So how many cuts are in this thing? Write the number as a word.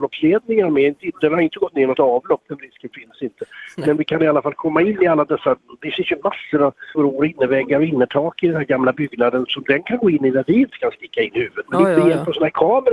two